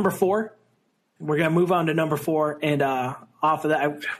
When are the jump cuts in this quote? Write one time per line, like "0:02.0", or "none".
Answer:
none